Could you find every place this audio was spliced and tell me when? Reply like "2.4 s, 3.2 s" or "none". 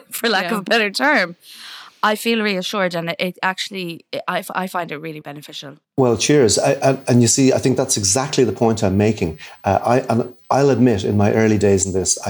5.2 s, 5.8 s